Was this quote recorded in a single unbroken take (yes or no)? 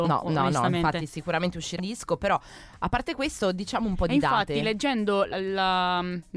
no